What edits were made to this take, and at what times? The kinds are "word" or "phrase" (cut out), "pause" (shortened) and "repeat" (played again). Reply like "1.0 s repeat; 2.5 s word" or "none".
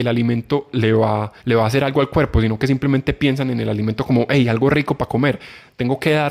1.4 s pause